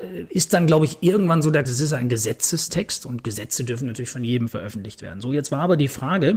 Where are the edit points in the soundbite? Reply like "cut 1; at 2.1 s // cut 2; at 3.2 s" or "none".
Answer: cut 1; at 1.6 s